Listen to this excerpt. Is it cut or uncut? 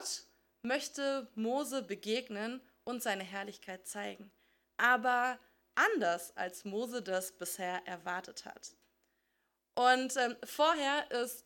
uncut